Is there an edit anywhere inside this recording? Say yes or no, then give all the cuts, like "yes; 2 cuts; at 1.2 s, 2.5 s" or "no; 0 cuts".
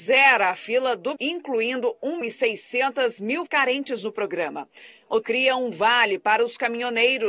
yes; 4 cuts; at 1.2 s, 2.2 s, 3.5 s, 5.2 s